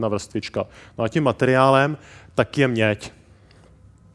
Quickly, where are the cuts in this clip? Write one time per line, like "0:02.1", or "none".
none